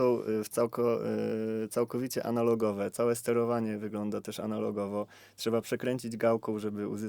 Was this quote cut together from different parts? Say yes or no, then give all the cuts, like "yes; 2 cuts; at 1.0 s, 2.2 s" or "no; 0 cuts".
no; 0 cuts